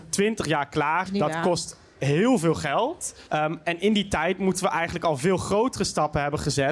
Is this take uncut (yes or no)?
no